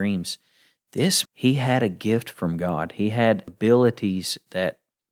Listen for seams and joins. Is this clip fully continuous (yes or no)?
no